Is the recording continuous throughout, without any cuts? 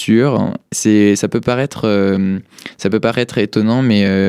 yes; 0 cuts

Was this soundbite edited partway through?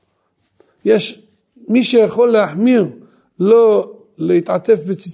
no; 0 cuts

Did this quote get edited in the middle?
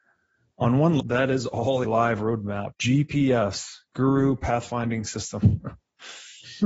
yes; 3 cuts; at 1.0 s, 1.8 s, 2.7 s

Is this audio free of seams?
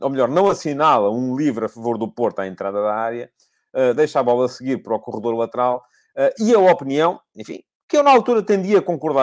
yes; 0 cuts

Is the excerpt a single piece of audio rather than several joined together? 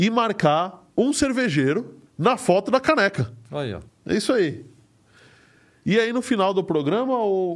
no; 3 cuts; at 0.9 s, 2.1 s, 3.9 s

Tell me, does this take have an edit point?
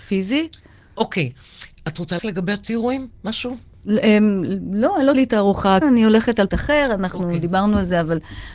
yes; 5 cuts; at 1.8 s, 2.2 s, 5.1 s, 5.8 s, 6.5 s

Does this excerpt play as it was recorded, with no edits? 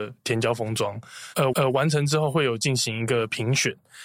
no; 1 cut; at 1.5 s

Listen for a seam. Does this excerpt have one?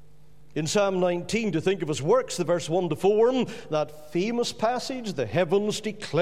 no; 0 cuts

